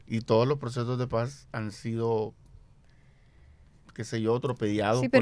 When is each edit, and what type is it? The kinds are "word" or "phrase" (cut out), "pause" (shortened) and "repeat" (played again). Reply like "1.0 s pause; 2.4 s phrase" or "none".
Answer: none